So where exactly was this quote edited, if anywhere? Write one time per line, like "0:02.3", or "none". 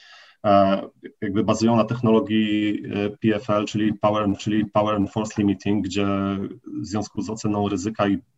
0:04.4